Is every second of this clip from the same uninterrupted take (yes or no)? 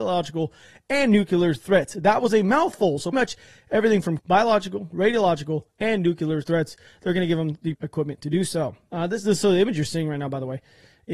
no